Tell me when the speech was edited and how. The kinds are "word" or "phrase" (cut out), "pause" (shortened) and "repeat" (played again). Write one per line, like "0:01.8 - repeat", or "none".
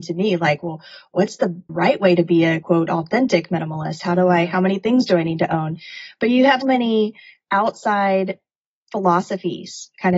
0:01.7 - word
0:02.6 - word
0:06.6 - word